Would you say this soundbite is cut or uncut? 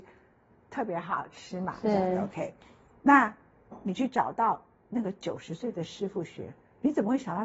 uncut